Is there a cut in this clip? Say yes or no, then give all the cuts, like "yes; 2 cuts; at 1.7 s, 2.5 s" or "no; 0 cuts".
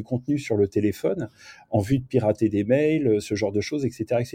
no; 0 cuts